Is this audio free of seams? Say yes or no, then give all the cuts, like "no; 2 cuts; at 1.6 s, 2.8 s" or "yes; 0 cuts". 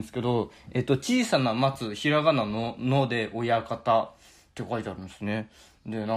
yes; 0 cuts